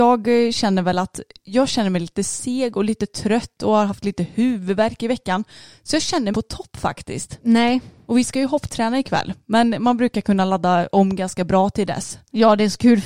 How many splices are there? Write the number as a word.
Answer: one